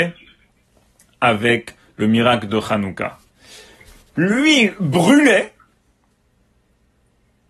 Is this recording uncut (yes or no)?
yes